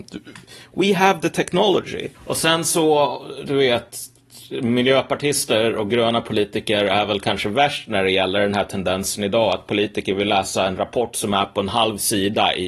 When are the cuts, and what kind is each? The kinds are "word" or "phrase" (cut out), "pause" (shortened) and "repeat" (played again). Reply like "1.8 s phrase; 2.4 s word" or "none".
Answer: 2.1 s pause